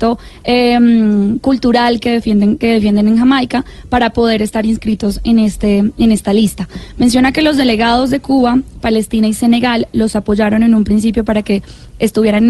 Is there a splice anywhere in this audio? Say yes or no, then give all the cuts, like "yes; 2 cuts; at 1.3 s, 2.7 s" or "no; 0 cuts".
no; 0 cuts